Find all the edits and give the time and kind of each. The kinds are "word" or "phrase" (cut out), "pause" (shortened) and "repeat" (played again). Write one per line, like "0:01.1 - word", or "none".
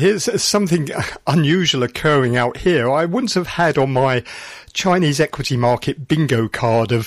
none